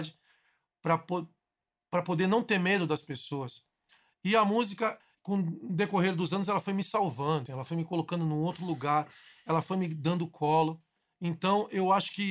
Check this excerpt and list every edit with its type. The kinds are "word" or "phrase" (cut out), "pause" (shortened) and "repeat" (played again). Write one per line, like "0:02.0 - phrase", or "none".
0:07.5 - word